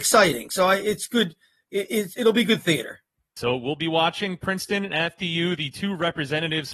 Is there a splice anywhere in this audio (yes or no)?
no